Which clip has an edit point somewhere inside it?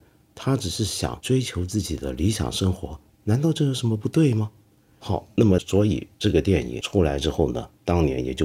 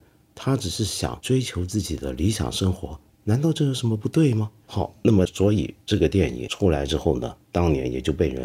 second; 1 cut; at 4.6 s

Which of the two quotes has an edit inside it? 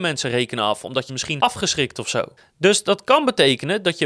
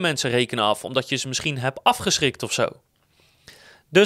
first; 3 cuts; at 1.1 s, 1.4 s, 2.4 s

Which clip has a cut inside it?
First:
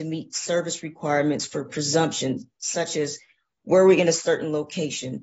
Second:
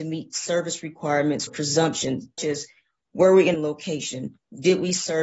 second; 3 cuts; at 1.5 s, 2.4 s, 3.5 s

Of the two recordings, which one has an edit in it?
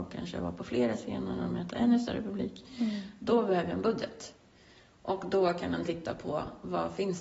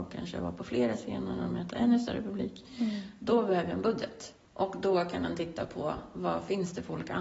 second; 1 cut; at 4.4 s

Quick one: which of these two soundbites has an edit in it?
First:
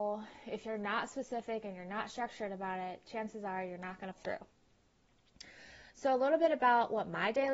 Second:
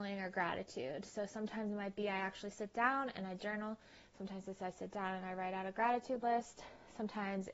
first; 1 cut; at 4.2 s

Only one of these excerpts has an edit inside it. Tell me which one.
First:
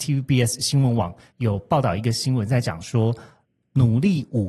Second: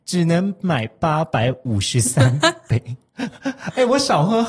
second; 1 cut; at 3.1 s

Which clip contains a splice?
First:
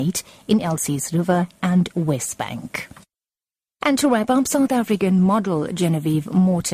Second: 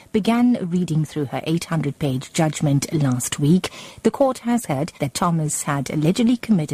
second; 1 cut; at 5.0 s

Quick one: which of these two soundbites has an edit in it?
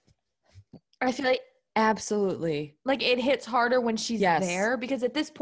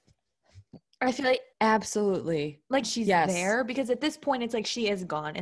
second; 2 cuts; at 1.5 s, 2.8 s

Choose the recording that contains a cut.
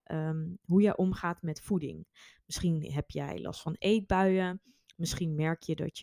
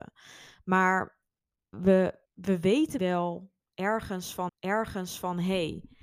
second; 4 cuts; at 1.7 s, 2.2 s, 3.0 s, 4.5 s

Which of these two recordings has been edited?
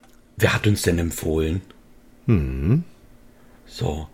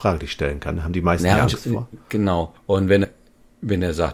second; 2 cuts; at 2.6 s, 3.0 s

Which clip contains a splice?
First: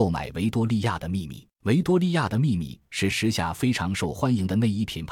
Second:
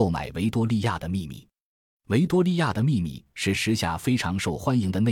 first; 1 cut; at 1.5 s

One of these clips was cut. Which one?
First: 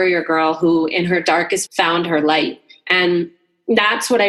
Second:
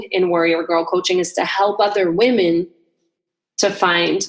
first; 1 cut; at 1.7 s

